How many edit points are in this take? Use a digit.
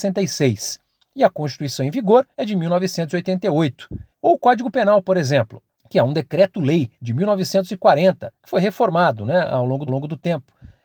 6